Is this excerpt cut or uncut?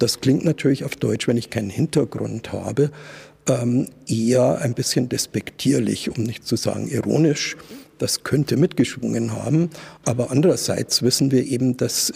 cut